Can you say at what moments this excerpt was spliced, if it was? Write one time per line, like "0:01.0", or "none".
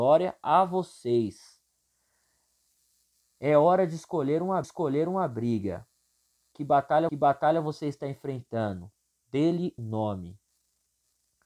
0:04.6
0:07.1
0:09.8